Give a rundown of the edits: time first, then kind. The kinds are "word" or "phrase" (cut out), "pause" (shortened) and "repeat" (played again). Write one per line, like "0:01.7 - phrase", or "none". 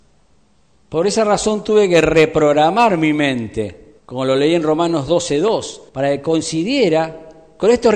0:04.0 - pause
0:05.9 - pause